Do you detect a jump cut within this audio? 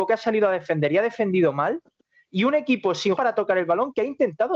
yes; 1 cut; at 3.1 s

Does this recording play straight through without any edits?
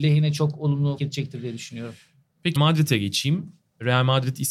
no; 2 cuts; at 1.0 s, 2.6 s

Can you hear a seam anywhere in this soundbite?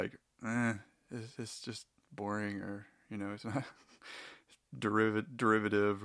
no; 0 cuts

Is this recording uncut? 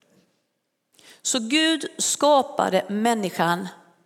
yes; 0 cuts

